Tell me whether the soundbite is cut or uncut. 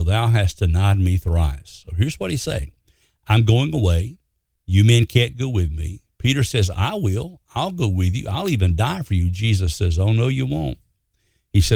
uncut